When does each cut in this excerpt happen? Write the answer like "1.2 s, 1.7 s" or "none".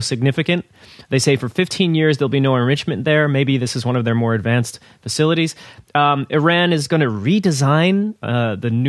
none